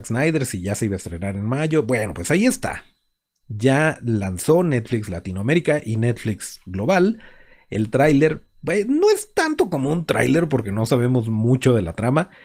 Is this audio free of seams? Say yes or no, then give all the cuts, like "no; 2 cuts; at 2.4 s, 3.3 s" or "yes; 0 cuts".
yes; 0 cuts